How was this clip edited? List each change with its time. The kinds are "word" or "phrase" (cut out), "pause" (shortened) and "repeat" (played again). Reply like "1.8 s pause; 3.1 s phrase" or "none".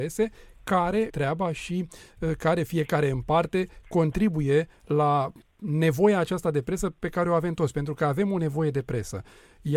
1.1 s phrase; 5.4 s pause